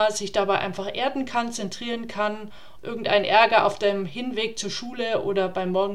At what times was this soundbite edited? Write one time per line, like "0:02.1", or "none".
0:02.8